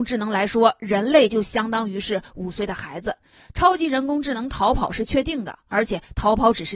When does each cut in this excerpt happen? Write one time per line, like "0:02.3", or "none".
none